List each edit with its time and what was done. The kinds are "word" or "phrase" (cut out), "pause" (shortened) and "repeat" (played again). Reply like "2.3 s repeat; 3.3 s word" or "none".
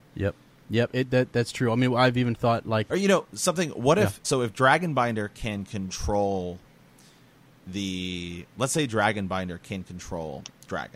2.9 s word; 4.2 s word